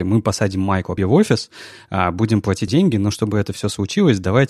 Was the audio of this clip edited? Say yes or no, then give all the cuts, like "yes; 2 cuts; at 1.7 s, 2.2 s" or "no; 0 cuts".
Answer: yes; 2 cuts; at 1.0 s, 2.7 s